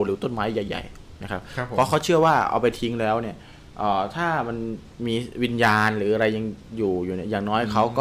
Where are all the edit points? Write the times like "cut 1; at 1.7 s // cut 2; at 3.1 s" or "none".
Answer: cut 1; at 1.2 s